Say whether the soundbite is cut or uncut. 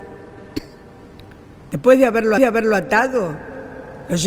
cut